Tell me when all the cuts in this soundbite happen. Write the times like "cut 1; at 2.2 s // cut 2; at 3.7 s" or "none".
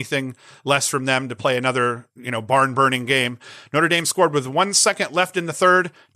none